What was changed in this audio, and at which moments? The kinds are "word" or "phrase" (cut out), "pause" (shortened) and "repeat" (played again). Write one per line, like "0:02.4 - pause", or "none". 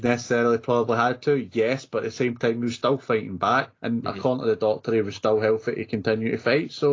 0:03.8 - pause